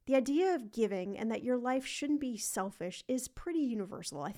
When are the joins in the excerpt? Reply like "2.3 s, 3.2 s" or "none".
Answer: none